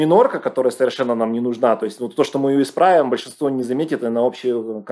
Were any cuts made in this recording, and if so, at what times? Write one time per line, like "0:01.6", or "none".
none